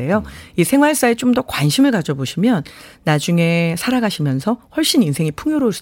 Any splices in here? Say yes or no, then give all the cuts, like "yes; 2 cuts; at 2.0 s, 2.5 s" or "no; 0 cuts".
no; 0 cuts